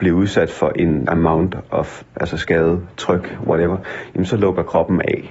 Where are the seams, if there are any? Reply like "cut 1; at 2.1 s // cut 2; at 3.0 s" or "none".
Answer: cut 1; at 1.0 s // cut 2; at 2.1 s